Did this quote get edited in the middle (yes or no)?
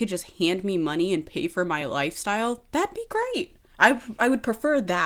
no